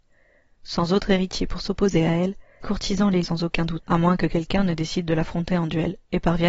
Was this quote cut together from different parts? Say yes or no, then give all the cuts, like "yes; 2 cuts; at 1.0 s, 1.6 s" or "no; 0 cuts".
yes; 3 cuts; at 2.6 s, 3.2 s, 3.8 s